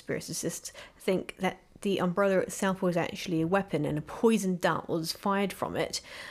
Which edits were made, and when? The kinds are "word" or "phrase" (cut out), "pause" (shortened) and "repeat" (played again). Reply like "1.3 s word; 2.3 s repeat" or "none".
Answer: none